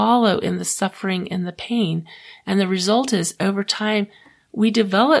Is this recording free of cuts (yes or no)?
yes